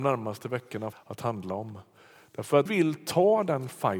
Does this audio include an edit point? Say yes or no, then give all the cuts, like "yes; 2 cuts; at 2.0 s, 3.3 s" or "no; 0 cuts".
yes; 2 cuts; at 0.9 s, 2.7 s